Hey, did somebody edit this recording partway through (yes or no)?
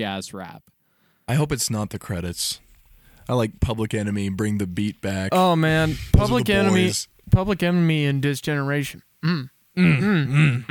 no